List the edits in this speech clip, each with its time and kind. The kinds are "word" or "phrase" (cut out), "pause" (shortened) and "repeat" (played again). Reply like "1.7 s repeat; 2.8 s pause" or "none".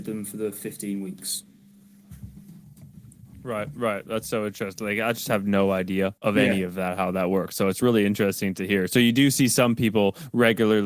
6.2 s pause